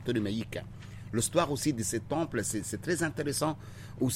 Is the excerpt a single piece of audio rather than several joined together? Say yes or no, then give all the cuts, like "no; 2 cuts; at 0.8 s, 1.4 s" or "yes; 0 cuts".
yes; 0 cuts